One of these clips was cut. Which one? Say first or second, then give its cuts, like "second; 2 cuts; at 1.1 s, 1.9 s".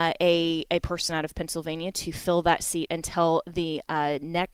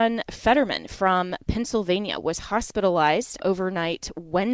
second; 1 cut; at 3.4 s